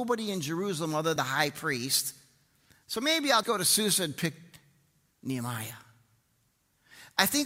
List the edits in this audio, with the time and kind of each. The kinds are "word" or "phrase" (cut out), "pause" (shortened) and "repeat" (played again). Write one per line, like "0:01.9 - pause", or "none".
0:01.2 - word
0:03.4 - word